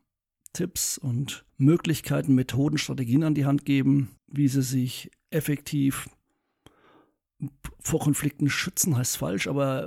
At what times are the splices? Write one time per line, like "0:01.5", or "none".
0:01.5
0:04.2